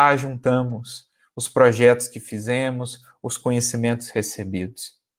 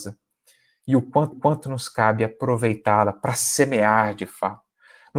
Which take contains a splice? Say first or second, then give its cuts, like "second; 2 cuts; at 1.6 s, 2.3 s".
second; 1 cut; at 1.3 s